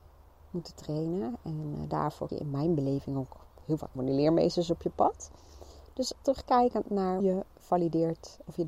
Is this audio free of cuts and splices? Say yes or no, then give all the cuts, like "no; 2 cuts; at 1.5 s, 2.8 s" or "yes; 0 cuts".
no; 4 cuts; at 2.3 s, 4.0 s, 6.2 s, 7.2 s